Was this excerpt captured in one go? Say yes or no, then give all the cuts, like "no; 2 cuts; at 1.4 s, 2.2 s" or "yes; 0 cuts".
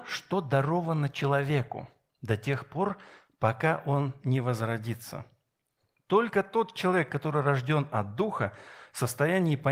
yes; 0 cuts